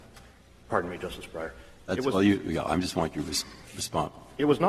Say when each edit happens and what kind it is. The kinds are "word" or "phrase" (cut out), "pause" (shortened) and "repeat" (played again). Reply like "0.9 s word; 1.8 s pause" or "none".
none